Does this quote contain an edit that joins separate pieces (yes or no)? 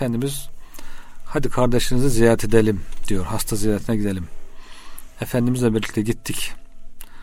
no